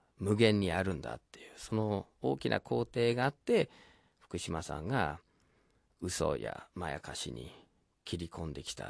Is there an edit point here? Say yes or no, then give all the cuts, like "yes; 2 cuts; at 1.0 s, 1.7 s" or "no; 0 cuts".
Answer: no; 0 cuts